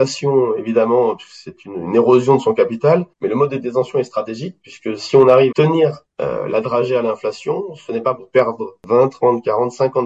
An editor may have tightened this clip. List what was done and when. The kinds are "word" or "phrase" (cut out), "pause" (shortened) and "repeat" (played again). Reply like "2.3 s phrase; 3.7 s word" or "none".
3.1 s pause; 5.5 s word

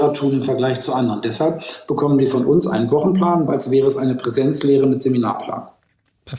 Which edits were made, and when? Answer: 3.5 s word

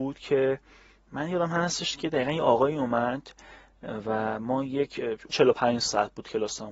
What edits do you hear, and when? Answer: 5.3 s word

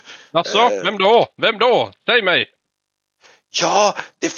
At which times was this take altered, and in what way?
none

